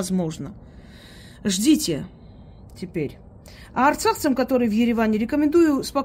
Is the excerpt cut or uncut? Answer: uncut